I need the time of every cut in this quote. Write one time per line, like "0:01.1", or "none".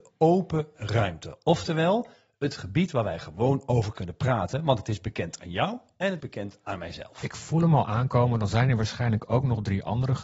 0:06.2